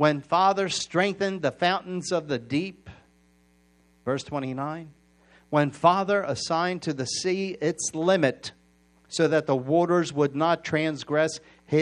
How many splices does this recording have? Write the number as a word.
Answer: zero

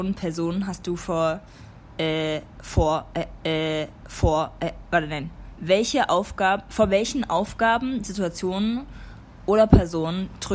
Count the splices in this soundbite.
one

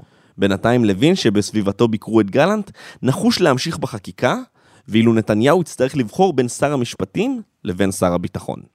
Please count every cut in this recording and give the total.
zero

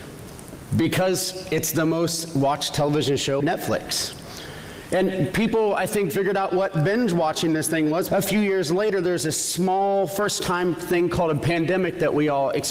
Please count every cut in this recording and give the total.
three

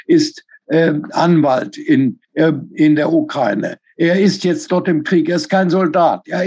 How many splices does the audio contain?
one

